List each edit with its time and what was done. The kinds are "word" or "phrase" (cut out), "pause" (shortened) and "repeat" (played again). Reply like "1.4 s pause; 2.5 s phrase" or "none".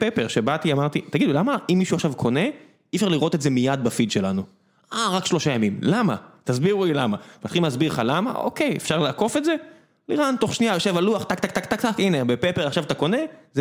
none